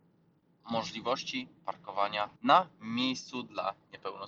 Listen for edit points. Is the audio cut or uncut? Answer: cut